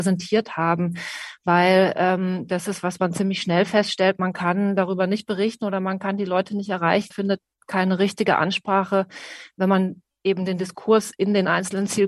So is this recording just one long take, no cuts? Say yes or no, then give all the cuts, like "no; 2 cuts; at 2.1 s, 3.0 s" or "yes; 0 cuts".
no; 1 cut; at 7.1 s